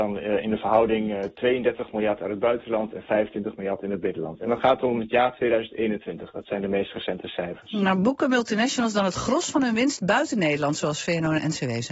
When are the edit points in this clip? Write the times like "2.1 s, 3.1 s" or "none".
none